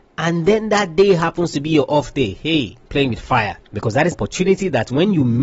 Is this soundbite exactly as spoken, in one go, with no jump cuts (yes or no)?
no